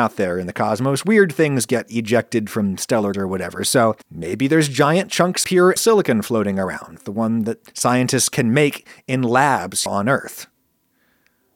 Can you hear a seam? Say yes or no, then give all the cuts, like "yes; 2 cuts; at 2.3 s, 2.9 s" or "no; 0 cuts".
yes; 7 cuts; at 3.1 s, 4.0 s, 5.4 s, 5.8 s, 7.0 s, 7.7 s, 9.9 s